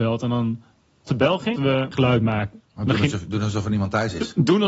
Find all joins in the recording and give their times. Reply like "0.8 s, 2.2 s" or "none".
1.1 s, 1.6 s, 1.9 s, 2.7 s